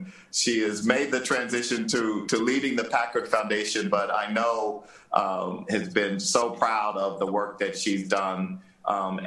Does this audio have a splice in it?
no; 0 cuts

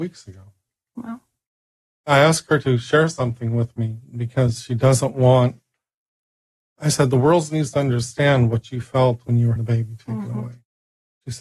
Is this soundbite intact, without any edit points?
no; 2 cuts; at 9.2 s, 9.6 s

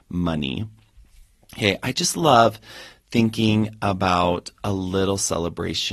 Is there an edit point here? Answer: no; 0 cuts

